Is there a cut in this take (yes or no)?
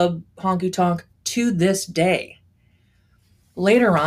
no